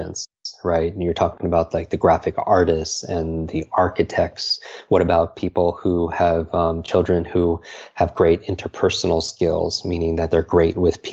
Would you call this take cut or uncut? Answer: uncut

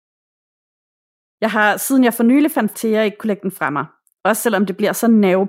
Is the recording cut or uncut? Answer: cut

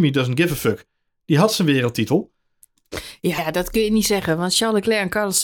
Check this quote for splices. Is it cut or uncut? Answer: cut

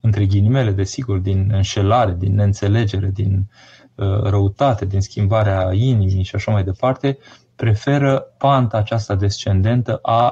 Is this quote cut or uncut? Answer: uncut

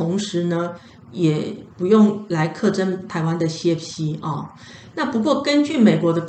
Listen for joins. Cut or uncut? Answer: uncut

